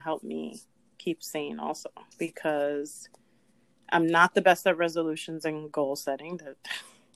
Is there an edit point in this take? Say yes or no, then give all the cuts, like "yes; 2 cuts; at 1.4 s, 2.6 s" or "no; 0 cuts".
yes; 1 cut; at 2.1 s